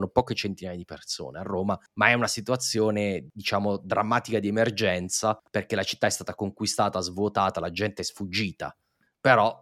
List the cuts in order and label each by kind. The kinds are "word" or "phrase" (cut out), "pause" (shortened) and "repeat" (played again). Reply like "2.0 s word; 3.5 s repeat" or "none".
1.9 s pause; 5.5 s pause